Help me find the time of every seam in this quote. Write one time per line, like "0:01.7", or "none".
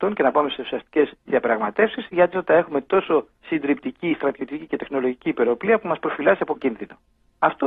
0:01.2
0:02.3
0:03.3
0:06.5